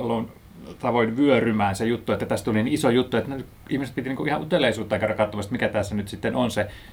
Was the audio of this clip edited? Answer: no; 0 cuts

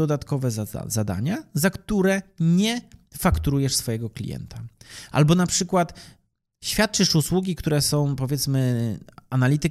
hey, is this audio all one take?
yes; 0 cuts

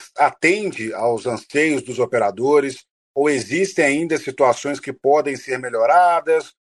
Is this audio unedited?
yes; 0 cuts

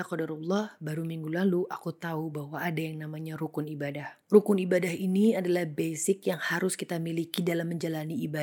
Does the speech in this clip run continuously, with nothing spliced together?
no; 1 cut; at 4.2 s

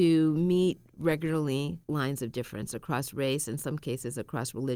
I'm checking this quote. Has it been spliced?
yes; 1 cut; at 1.8 s

